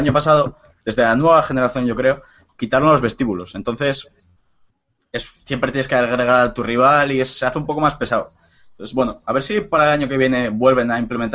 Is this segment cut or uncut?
uncut